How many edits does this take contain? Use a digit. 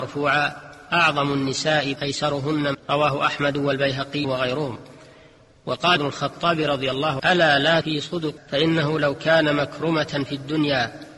7